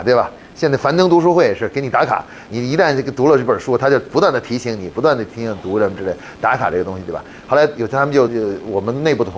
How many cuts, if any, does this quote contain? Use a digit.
1